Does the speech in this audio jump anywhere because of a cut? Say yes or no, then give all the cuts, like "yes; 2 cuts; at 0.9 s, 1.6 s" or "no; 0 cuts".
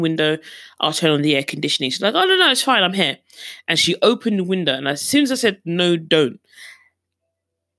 no; 0 cuts